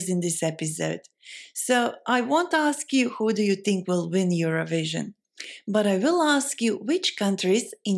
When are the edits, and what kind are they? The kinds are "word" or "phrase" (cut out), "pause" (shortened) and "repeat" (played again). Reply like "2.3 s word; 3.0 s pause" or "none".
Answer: none